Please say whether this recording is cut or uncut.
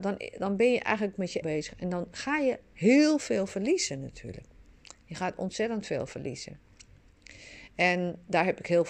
cut